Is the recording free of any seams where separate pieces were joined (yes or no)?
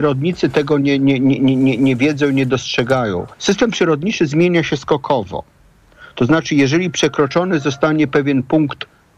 no